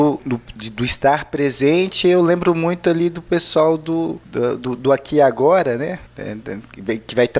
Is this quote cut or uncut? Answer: uncut